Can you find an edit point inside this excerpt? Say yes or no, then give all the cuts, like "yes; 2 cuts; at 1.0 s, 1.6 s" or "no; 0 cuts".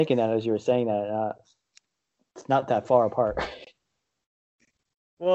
no; 0 cuts